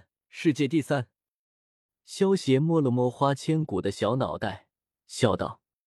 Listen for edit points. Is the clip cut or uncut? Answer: uncut